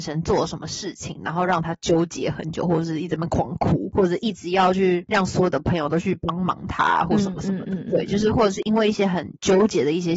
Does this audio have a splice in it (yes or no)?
no